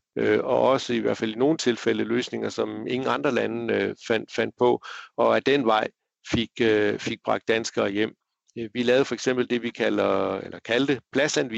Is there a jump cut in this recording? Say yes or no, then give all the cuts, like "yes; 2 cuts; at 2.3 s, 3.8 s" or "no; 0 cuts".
no; 0 cuts